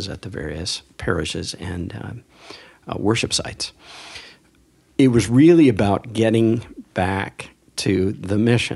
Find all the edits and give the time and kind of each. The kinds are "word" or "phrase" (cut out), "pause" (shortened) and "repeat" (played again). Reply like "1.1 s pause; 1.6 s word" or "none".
none